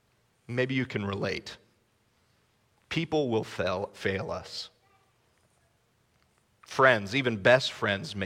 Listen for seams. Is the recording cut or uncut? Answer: uncut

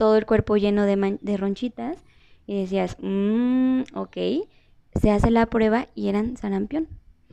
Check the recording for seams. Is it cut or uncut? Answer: uncut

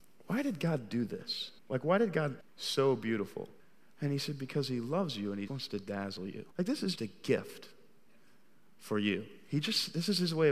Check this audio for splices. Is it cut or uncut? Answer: cut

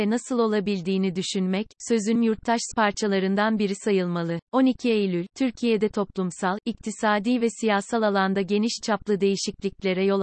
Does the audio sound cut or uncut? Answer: cut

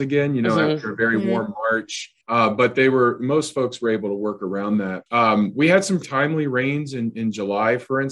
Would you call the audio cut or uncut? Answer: cut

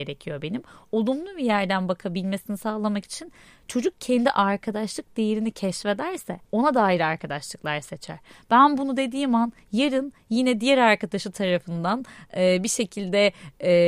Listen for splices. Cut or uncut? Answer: cut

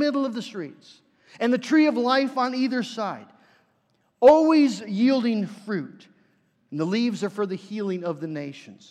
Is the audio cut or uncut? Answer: uncut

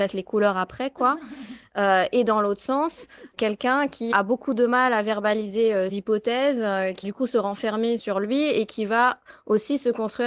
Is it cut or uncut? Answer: cut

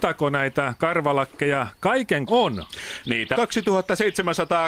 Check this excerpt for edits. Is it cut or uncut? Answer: cut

